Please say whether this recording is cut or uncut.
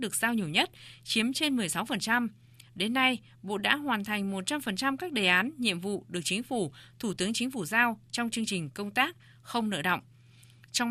uncut